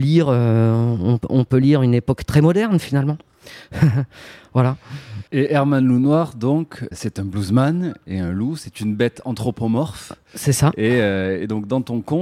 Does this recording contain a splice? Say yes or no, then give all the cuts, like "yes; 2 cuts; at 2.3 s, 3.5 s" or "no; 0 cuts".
yes; 1 cut; at 5.3 s